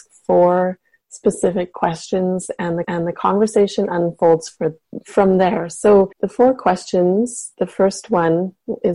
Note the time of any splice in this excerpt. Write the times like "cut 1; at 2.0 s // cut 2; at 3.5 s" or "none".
cut 1; at 2.8 s // cut 2; at 6.1 s